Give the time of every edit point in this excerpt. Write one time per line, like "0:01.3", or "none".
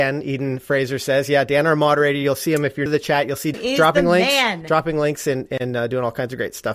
0:02.9
0:03.5